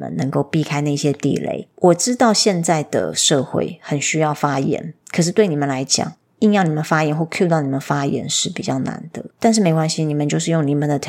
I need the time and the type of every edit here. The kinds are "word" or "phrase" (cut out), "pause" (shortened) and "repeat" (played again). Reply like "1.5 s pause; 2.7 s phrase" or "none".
5.0 s pause; 6.3 s pause; 9.3 s pause